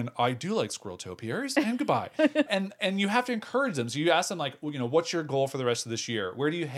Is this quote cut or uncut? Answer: cut